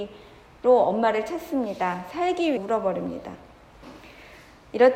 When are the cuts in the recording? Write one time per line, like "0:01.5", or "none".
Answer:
0:02.6

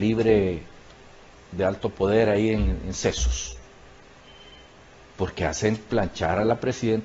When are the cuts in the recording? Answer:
none

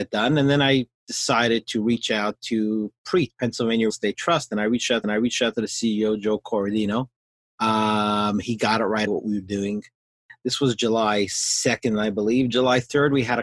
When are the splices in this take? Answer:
0:03.9
0:05.0
0:07.2
0:09.1

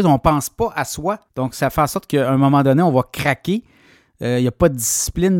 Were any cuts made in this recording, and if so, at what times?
0:01.3

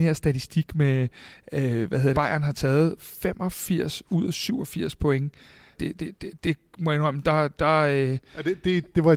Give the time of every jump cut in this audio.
0:02.1
0:05.7

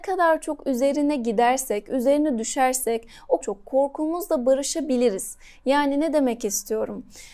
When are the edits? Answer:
0:03.4

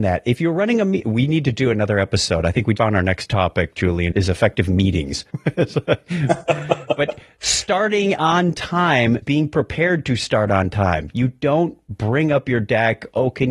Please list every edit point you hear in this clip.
0:02.8
0:04.1
0:05.3
0:09.2

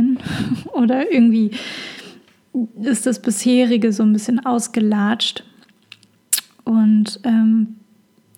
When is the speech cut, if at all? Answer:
none

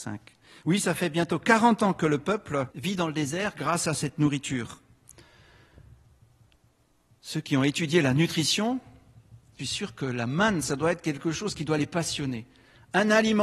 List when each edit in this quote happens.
0:02.7
0:09.6

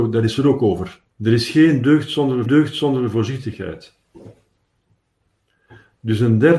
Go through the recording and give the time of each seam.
0:01.1
0:02.5

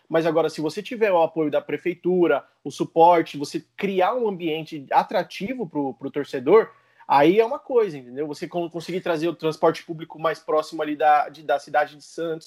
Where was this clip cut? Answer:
none

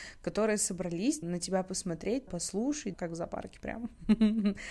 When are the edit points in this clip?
0:01.2
0:02.3
0:02.9

